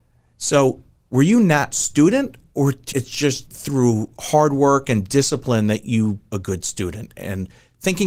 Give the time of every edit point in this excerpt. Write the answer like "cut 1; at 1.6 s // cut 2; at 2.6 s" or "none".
cut 1; at 1.7 s // cut 2; at 2.9 s // cut 3; at 3.5 s // cut 4; at 6.3 s